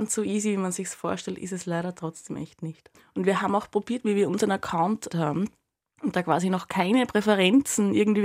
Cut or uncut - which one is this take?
cut